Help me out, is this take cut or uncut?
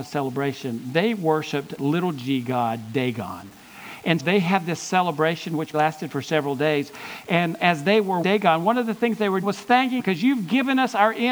cut